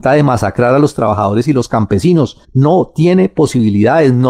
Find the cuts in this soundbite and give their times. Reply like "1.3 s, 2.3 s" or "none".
2.4 s